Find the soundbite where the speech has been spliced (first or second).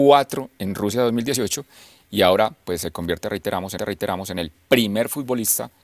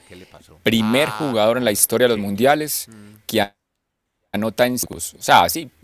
first